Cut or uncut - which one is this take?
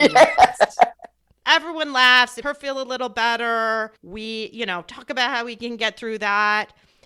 cut